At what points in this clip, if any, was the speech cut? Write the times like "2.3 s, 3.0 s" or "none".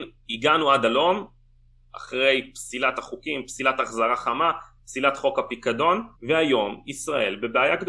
6.2 s